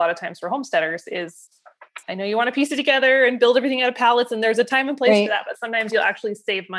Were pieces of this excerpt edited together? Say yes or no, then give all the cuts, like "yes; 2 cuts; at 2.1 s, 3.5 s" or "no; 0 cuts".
no; 0 cuts